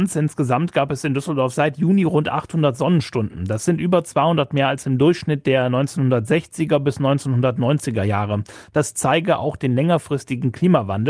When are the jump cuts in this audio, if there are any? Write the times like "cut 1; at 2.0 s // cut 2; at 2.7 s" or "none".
none